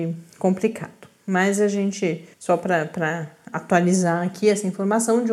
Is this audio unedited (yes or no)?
no